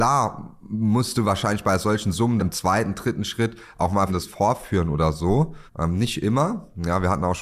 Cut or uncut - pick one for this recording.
cut